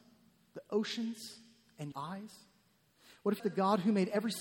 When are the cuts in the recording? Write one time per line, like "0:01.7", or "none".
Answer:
0:01.9
0:03.4

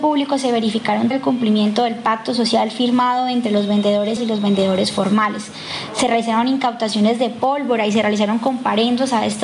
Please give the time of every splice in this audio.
0:01.1
0:04.2

